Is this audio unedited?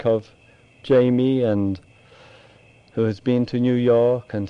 yes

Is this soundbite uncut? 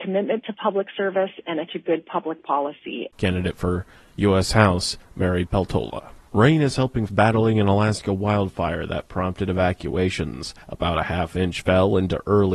no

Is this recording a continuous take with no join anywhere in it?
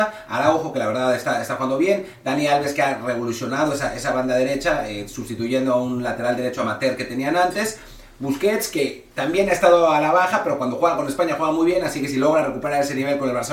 no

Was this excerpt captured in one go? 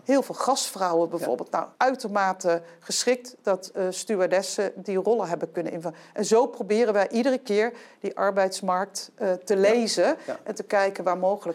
no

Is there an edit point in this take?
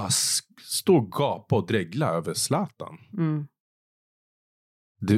no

